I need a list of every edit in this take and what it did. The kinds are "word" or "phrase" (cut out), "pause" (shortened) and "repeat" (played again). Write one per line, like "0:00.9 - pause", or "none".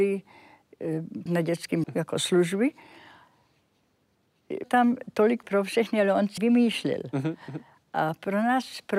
0:01.3 - word
0:01.8 - word
0:04.6 - word
0:05.4 - word
0:06.4 - word

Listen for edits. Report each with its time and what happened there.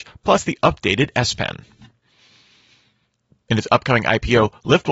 none

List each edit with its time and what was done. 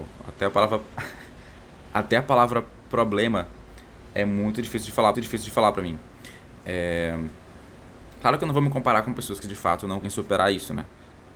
0:05.1 - repeat
0:10.0 - word

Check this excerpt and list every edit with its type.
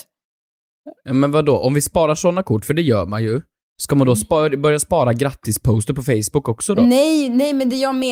none

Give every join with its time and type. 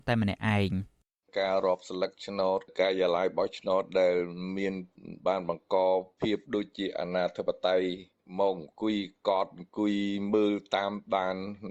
0:06.4 - pause

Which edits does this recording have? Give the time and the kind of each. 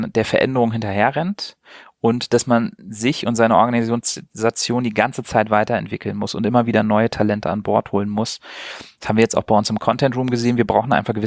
0:02.8 - pause

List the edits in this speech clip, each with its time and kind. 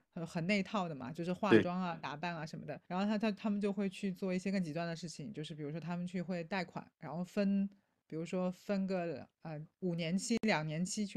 0:02.8 - pause

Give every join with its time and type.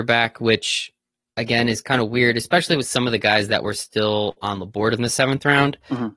none

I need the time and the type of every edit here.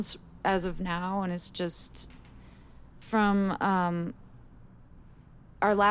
none

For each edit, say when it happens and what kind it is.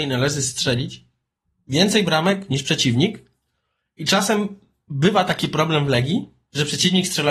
none

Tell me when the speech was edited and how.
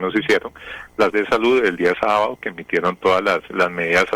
0:01.1 - word

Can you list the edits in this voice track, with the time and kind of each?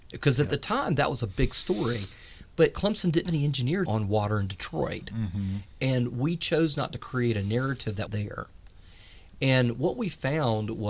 0:03.3 - word
0:03.9 - phrase
0:08.1 - word

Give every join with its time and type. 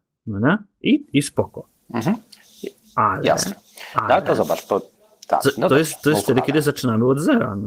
0:02.8 - pause

